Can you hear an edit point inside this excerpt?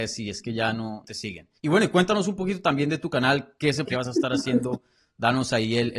yes; 3 cuts; at 1.0 s, 1.6 s, 3.8 s

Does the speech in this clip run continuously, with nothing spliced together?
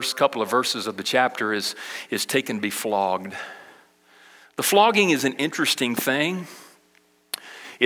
yes; 0 cuts

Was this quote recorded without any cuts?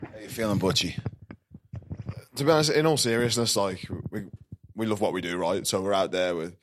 yes; 0 cuts

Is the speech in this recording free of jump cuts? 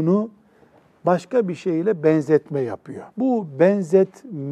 no; 1 cut; at 3.1 s

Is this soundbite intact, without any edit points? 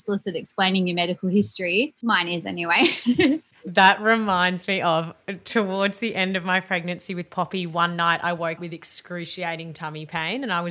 no; 2 cuts; at 2.0 s, 8.6 s

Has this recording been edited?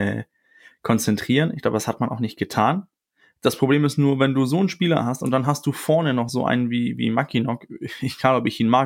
no; 0 cuts

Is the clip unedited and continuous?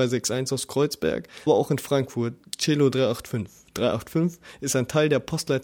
no; 1 cut; at 1.5 s

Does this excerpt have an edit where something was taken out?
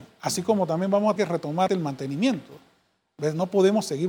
yes; 2 cuts; at 1.2 s, 1.7 s

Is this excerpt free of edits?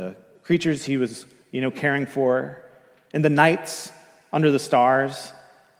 yes; 0 cuts

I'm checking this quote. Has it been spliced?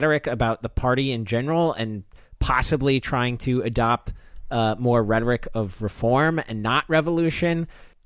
no; 0 cuts

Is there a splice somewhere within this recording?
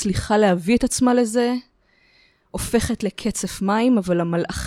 no; 0 cuts

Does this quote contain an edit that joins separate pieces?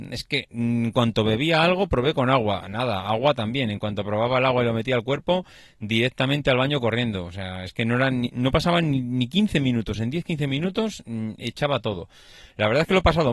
no; 0 cuts

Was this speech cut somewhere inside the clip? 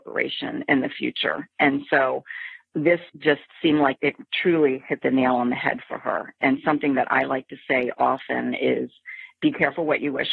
yes; 1 cut; at 3.1 s

